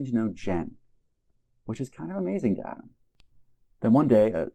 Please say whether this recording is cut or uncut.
uncut